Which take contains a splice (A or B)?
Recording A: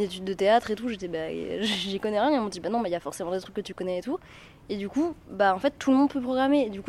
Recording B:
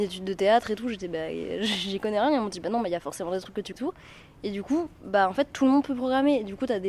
B